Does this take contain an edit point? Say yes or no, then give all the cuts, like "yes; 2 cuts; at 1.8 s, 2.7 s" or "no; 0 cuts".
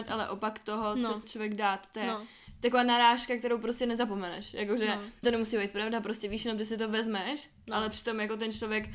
yes; 2 cuts; at 1.2 s, 5.2 s